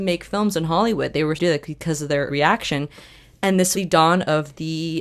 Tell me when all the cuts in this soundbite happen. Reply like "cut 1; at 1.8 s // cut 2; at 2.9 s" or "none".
cut 1; at 1.4 s // cut 2; at 2.3 s // cut 3; at 3.7 s